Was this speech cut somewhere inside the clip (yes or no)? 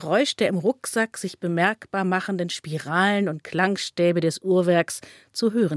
no